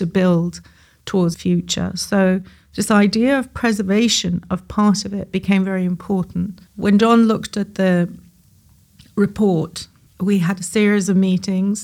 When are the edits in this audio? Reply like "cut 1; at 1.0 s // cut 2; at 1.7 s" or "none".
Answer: cut 1; at 1.3 s // cut 2; at 6.7 s // cut 3; at 10.1 s